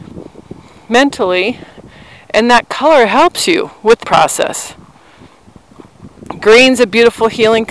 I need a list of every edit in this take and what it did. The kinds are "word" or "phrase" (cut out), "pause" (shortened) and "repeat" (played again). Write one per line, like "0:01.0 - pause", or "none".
0:04.0 - word